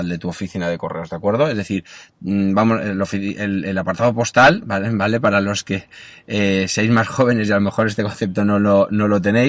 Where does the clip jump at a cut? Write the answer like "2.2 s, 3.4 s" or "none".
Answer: none